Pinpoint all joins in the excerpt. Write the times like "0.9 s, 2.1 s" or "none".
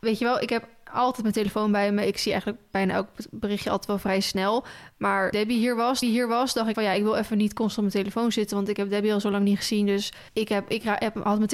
5.3 s, 6.0 s, 6.7 s, 10.3 s